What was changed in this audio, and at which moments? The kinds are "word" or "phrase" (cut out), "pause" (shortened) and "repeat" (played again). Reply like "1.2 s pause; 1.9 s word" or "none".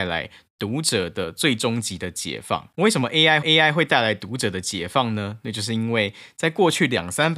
2.7 s pause; 3.4 s repeat